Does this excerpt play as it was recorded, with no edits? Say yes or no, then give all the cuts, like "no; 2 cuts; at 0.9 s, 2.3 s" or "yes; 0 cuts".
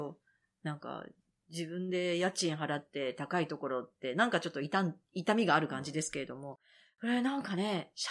yes; 0 cuts